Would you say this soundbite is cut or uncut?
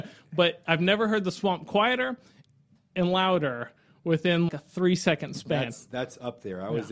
cut